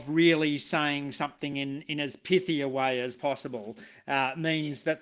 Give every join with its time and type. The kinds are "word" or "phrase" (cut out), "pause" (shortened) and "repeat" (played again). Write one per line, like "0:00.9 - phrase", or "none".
none

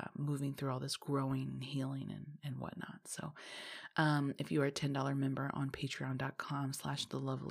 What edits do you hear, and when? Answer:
none

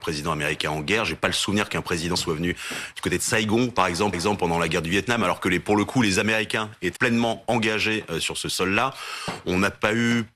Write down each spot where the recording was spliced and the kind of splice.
0:02.1 - word
0:04.1 - repeat
0:07.0 - word
0:08.2 - word

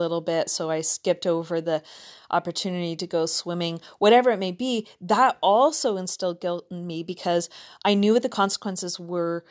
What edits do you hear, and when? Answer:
none

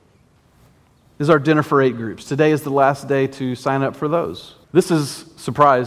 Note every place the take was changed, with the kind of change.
0:04.6 - pause

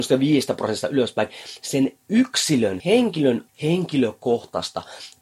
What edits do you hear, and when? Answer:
0:02.8 - word
0:03.5 - word

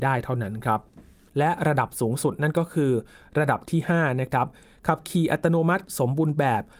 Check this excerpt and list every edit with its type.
none

